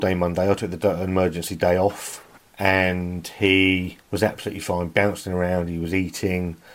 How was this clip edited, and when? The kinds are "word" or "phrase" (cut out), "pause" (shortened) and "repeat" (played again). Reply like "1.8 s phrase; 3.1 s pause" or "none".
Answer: 2.4 s pause; 4.0 s pause